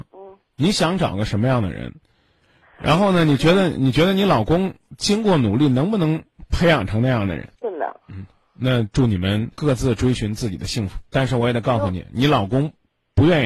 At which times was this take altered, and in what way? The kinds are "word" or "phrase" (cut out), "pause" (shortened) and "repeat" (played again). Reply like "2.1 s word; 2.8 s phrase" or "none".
7.5 s pause; 8.0 s pause; 9.5 s pause; 11.1 s pause